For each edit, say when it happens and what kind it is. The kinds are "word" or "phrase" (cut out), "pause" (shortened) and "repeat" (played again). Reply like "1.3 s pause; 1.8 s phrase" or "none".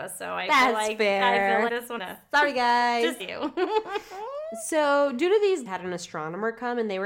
1.7 s word; 2.0 s phrase; 3.2 s word; 5.7 s phrase

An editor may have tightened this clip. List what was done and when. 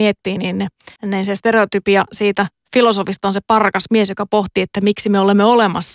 1.0 s pause

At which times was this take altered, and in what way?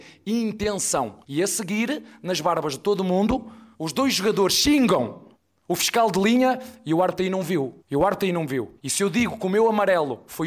1.2 s pause; 3.7 s pause; 5.3 s pause; 7.8 s pause; 8.8 s pause

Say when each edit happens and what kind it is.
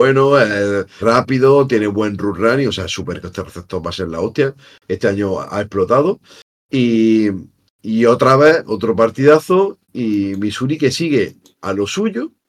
1.0 s word; 3.2 s word; 9.8 s word

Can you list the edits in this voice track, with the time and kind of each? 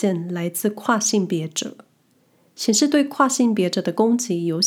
none

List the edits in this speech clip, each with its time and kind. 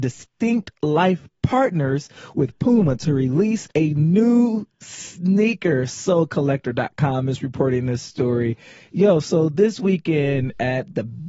3.7 s pause

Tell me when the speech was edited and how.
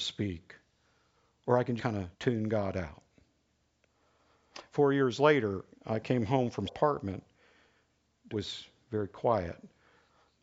1.8 s word; 2.1 s pause; 5.7 s pause; 6.7 s phrase; 8.3 s phrase

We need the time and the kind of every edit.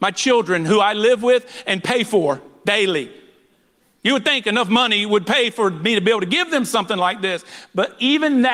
none

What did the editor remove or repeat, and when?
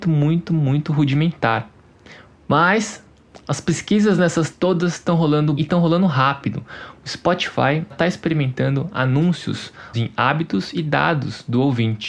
4.5 s word; 5.6 s word; 7.9 s word; 9.9 s word

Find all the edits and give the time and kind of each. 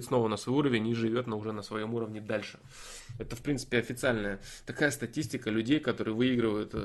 none

